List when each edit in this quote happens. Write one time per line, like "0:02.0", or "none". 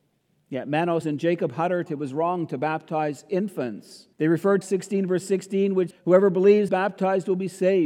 0:01.0
0:01.9
0:04.1
0:04.6
0:05.9
0:06.7

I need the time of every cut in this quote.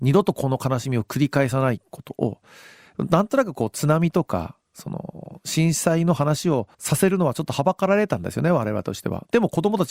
0:04.6
0:06.7

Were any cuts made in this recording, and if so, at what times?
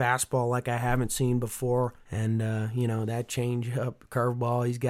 0:02.0

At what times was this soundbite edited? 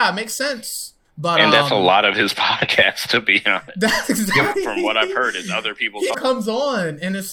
0:01.0
0:04.5
0:06.1

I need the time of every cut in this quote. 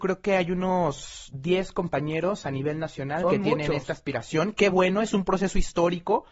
none

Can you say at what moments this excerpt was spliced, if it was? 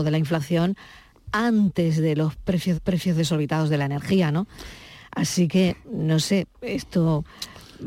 0:02.7

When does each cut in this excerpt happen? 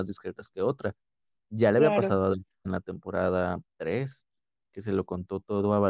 0:02.6

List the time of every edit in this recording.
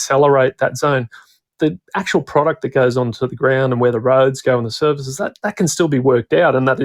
none

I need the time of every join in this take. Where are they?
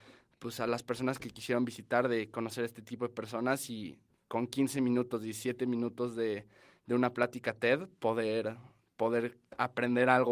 none

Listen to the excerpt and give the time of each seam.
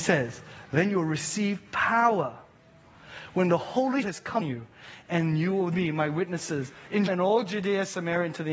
0:04.0
0:04.4
0:05.7
0:07.1

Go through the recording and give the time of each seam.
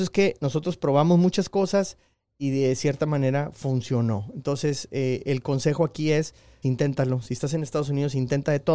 0:06.6

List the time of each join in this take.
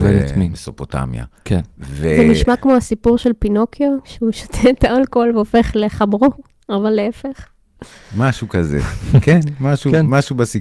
none

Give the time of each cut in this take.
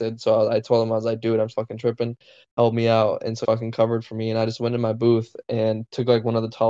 0:01.5
0:03.4

